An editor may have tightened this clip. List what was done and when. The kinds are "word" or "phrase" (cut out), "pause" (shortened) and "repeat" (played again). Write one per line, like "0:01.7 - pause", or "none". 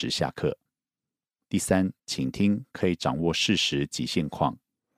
0:02.0 - pause